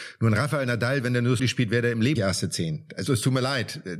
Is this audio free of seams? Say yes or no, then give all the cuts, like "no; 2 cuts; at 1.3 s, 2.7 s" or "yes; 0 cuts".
no; 3 cuts; at 1.4 s, 2.2 s, 3.1 s